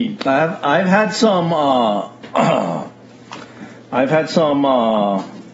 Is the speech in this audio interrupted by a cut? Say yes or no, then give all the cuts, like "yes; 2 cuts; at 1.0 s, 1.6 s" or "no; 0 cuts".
no; 0 cuts